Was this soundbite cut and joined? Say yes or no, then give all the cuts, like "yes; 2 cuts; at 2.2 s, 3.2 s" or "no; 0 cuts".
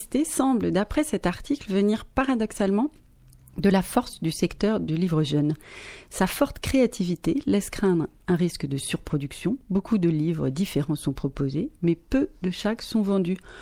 no; 0 cuts